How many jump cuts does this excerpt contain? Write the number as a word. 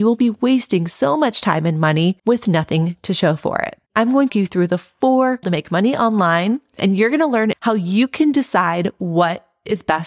four